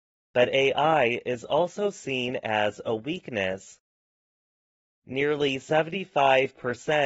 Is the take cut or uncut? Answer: uncut